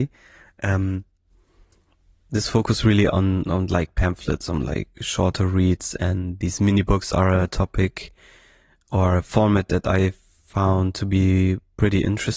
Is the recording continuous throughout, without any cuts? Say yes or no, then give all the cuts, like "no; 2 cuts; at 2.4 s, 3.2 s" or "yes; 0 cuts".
yes; 0 cuts